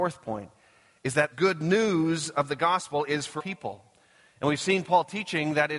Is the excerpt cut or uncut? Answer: cut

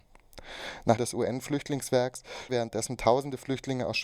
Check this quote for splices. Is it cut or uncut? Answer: cut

